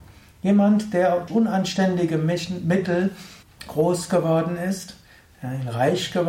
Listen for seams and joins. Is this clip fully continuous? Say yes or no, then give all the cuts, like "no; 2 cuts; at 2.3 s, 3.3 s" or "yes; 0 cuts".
no; 2 cuts; at 1.3 s, 3.4 s